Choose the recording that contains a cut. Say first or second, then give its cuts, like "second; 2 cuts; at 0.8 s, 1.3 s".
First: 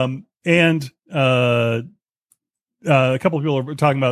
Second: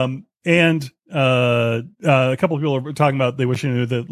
second; 1 cut; at 1.9 s